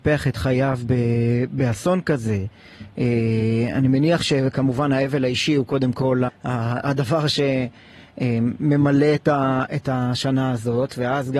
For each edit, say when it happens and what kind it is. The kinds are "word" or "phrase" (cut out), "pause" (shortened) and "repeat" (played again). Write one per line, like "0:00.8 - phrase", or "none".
0:06.3 - word